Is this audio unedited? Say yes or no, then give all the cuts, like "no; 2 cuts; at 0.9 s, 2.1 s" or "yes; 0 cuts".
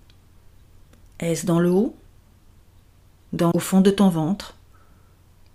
no; 1 cut; at 3.5 s